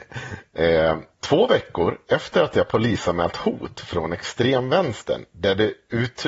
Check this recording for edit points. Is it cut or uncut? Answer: uncut